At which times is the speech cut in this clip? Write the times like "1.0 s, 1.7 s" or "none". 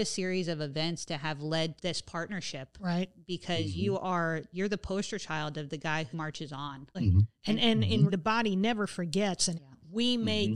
1.8 s, 6.1 s, 6.9 s, 8.1 s, 9.5 s